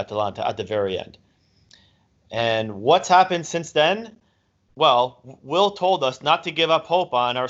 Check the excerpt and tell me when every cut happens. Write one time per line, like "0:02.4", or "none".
none